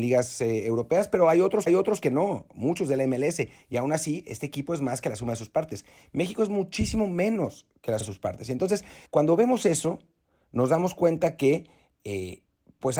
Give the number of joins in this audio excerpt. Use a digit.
3